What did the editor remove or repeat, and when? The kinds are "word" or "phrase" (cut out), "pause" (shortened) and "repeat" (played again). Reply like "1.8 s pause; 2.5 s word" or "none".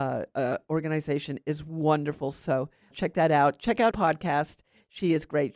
2.9 s word; 3.9 s phrase